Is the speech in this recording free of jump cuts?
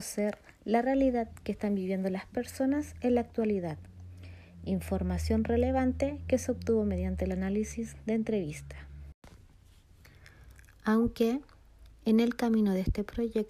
yes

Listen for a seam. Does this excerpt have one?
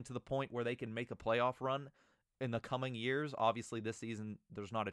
no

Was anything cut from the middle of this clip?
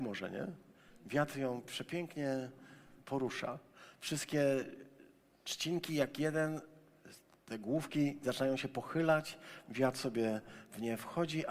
yes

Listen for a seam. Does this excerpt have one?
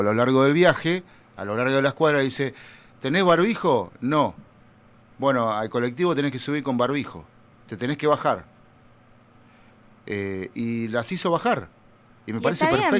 no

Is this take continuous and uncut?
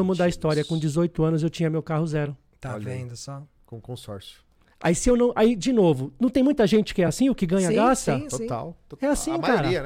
yes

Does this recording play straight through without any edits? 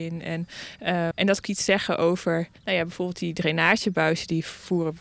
no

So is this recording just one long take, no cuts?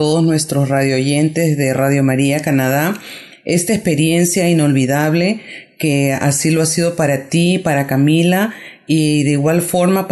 yes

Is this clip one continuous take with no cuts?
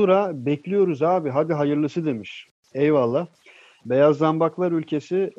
yes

